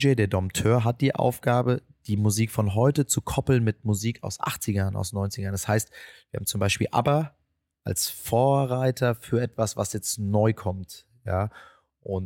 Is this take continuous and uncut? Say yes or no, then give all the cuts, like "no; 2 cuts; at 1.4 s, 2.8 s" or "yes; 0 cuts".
yes; 0 cuts